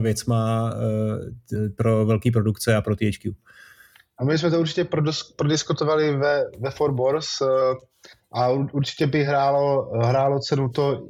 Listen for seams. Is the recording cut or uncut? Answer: uncut